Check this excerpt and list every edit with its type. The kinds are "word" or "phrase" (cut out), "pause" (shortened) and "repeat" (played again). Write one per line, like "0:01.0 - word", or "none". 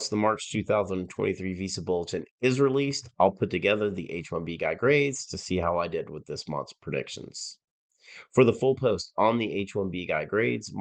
none